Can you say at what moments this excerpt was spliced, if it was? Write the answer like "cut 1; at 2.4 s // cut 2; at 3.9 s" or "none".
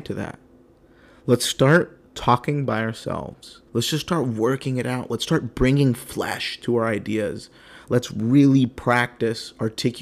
cut 1; at 3.7 s